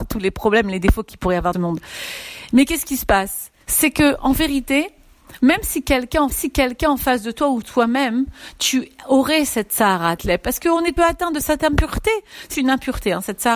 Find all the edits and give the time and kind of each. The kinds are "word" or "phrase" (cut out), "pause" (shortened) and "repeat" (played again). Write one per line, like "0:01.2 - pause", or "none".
0:01.5 - phrase
0:03.6 - pause
0:05.4 - word
0:06.3 - repeat
0:10.2 - phrase
0:11.0 - phrase
0:12.5 - word